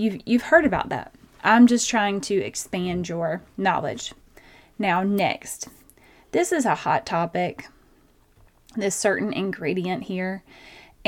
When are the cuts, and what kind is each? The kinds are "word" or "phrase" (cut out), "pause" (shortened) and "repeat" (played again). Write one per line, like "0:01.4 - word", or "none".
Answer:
none